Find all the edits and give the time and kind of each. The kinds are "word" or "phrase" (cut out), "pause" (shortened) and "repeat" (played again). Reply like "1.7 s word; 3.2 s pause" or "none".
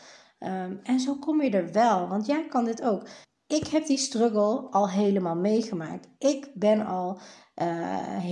3.2 s pause